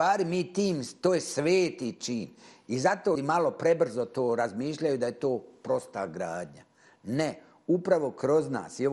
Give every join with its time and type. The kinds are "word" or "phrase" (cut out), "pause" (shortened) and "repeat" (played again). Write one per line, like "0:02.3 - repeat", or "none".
0:03.2 - word